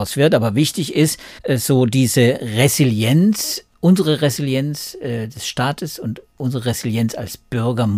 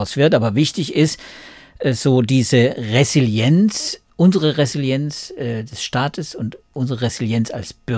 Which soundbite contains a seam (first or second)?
first